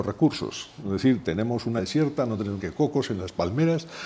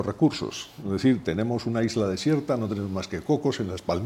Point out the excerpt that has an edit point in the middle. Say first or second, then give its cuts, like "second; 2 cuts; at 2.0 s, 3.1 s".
first; 2 cuts; at 1.8 s, 2.6 s